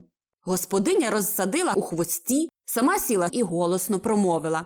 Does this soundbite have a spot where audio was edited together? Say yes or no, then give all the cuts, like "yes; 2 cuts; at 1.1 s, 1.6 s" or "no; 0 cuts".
yes; 2 cuts; at 1.7 s, 3.3 s